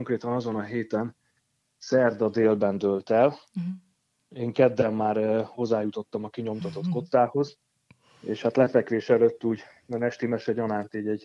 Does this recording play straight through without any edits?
yes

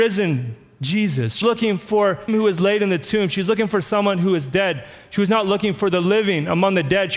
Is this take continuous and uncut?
no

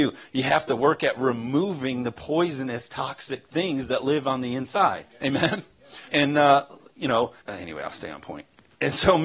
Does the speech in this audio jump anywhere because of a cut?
yes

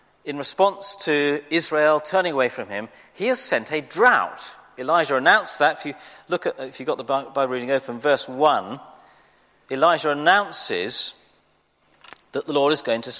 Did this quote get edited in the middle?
no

